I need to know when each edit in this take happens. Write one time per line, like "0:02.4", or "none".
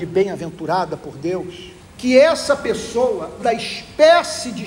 0:01.8
0:03.4